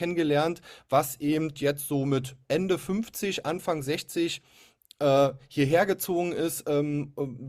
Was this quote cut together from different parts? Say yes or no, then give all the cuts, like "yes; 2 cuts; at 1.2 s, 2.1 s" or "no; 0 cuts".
no; 0 cuts